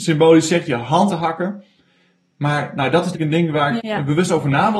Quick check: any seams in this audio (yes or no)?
yes